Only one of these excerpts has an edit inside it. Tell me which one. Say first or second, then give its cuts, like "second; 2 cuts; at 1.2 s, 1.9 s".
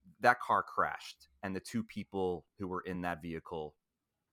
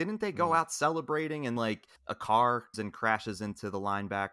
second; 3 cuts; at 1.6 s, 2.0 s, 2.7 s